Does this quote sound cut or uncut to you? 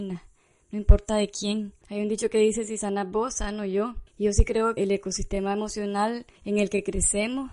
cut